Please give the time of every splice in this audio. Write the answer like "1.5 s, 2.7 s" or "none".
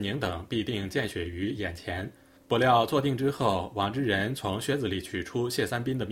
none